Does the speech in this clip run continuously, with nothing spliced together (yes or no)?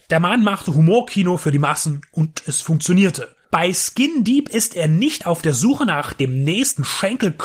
no